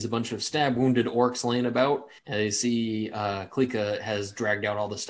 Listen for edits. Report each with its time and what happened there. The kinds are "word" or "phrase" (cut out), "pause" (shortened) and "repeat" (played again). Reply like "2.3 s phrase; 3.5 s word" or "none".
2.2 s pause